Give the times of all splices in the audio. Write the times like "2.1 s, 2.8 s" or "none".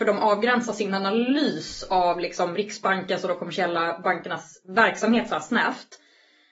none